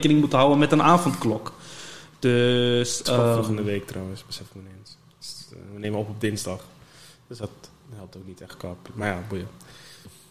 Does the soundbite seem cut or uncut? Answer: uncut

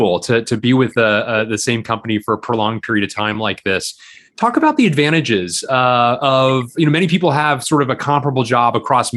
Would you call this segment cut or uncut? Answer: uncut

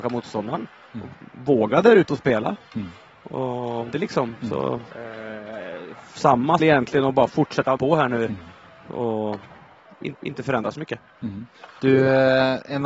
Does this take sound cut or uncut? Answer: cut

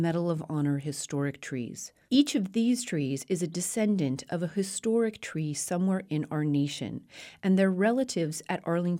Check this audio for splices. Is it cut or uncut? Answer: uncut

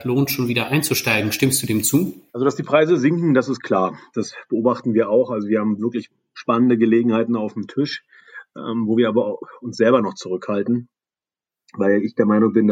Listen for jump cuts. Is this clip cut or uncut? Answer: cut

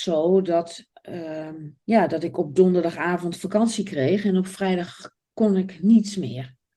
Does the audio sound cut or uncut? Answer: cut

